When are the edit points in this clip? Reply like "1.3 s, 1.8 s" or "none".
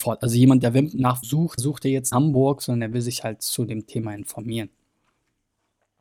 1.2 s, 1.6 s, 2.1 s